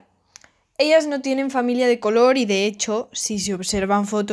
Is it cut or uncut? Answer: uncut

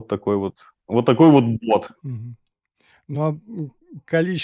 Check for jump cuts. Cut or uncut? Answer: uncut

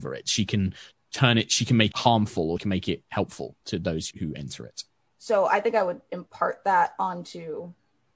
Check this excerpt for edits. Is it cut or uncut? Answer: cut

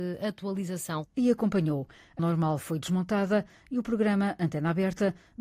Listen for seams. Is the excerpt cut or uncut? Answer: cut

